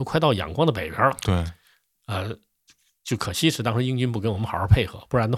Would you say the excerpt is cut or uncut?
uncut